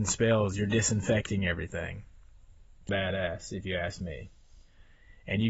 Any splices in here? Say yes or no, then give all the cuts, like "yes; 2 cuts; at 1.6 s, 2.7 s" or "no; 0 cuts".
yes; 1 cut; at 2.9 s